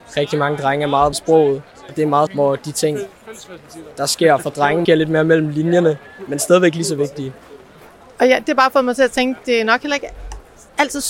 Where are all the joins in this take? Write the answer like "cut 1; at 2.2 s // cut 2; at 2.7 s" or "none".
cut 1; at 1.1 s // cut 2; at 2.3 s // cut 3; at 4.8 s